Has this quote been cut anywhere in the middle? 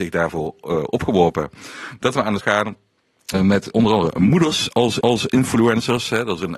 yes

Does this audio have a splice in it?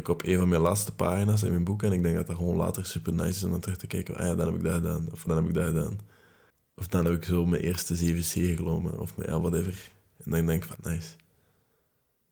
yes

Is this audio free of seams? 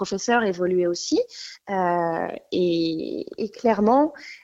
yes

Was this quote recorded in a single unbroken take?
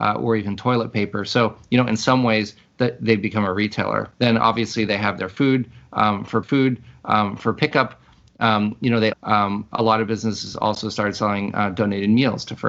no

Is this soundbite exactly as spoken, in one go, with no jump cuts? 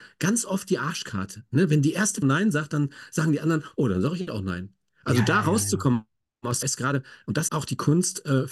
no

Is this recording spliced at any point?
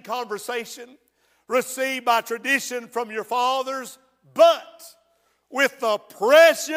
no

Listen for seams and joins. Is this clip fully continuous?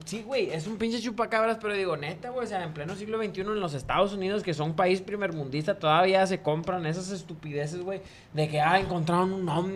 yes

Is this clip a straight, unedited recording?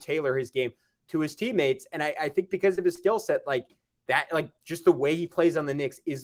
yes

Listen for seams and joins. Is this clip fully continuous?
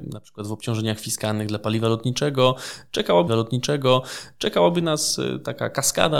no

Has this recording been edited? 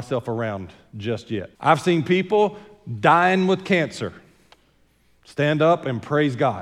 yes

